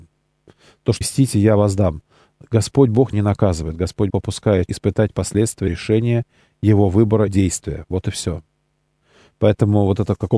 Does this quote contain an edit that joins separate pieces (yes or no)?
yes